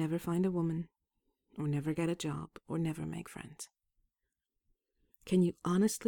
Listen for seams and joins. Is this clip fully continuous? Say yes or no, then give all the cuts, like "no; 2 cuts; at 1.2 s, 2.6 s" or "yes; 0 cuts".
yes; 0 cuts